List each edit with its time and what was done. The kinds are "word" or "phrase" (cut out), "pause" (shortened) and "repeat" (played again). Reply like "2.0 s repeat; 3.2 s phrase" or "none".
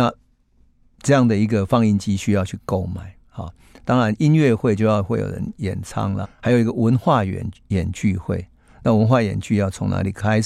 6.2 s phrase